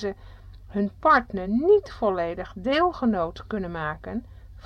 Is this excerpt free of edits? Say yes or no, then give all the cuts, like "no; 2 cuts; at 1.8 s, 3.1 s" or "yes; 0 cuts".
yes; 0 cuts